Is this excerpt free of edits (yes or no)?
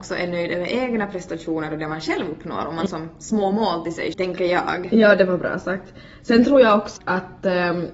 no